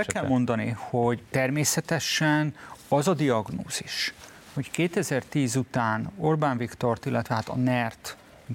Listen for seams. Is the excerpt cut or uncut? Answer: cut